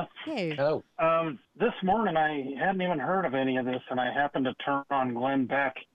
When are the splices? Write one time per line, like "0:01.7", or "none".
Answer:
0:01.4